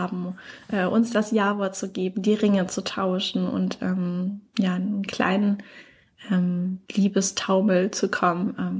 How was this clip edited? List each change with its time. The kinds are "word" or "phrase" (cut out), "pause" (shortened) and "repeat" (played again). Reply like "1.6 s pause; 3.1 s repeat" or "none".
6.8 s pause